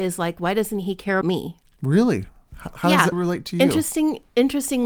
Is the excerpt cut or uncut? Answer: cut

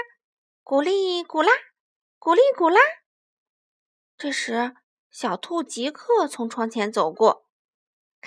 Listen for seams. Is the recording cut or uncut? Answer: uncut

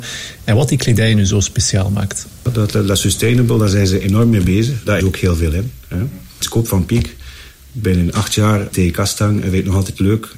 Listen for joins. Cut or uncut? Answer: cut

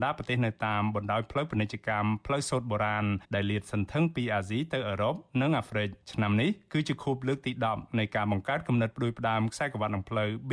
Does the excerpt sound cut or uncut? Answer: cut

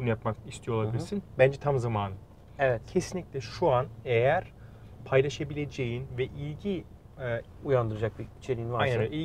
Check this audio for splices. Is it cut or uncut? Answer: uncut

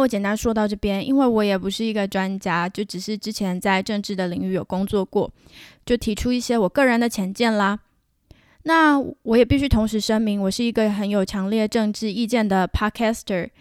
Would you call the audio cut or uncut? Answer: uncut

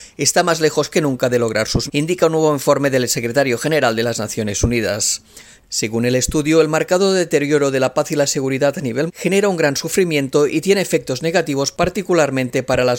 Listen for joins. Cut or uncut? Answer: cut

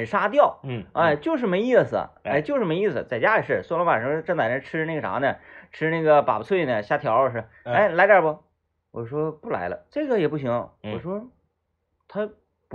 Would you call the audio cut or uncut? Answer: uncut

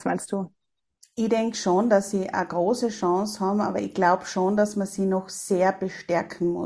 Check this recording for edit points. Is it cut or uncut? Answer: uncut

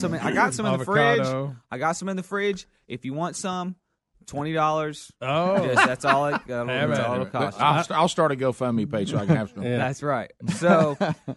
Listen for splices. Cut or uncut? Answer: uncut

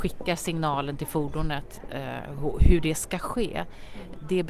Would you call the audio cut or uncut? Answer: uncut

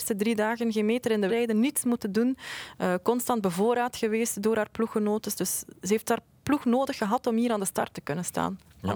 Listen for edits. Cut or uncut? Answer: cut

